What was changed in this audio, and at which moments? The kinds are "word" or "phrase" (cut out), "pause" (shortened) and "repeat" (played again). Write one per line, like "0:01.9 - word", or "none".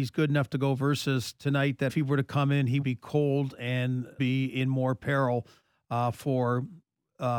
0:01.9 - phrase
0:02.8 - word
0:04.2 - word